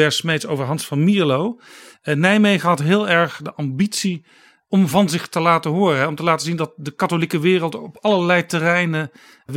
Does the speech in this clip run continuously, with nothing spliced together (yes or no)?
yes